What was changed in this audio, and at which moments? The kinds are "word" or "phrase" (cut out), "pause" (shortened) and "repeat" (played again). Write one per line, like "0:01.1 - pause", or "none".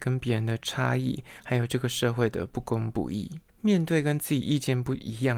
0:03.5 - pause